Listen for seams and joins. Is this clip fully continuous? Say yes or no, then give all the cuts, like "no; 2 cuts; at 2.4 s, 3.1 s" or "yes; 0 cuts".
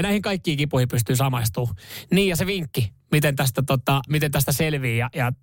no; 1 cut; at 4.1 s